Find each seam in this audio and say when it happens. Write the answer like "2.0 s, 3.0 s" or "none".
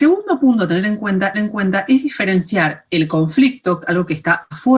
1.3 s